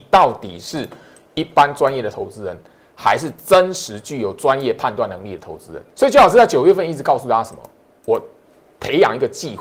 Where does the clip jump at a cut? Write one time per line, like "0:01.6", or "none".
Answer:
0:05.9